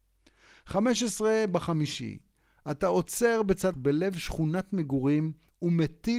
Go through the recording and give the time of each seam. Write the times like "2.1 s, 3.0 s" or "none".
3.7 s